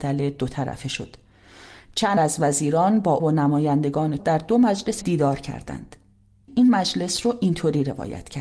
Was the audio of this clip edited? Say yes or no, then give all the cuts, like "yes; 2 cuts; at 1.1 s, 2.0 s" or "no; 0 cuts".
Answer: yes; 5 cuts; at 2.2 s, 3.2 s, 4.2 s, 5.0 s, 6.5 s